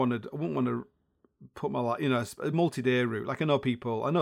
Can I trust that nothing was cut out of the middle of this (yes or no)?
yes